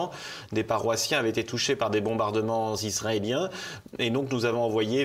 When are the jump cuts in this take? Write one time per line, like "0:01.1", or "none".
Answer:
none